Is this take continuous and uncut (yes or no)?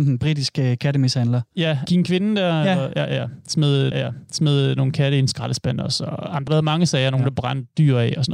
no